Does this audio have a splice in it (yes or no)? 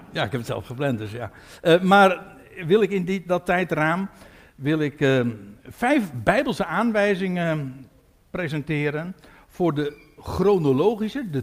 no